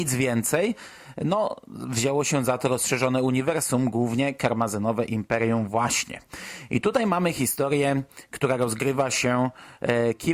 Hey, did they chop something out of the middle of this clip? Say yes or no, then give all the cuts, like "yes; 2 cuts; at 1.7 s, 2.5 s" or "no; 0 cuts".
no; 0 cuts